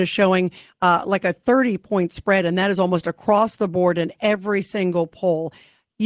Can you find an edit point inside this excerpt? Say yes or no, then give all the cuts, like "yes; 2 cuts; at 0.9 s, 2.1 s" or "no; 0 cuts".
no; 0 cuts